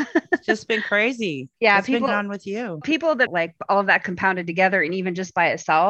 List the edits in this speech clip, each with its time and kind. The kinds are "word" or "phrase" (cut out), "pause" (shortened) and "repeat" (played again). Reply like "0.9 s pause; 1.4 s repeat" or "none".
1.5 s pause; 2.1 s word; 2.8 s word; 3.3 s phrase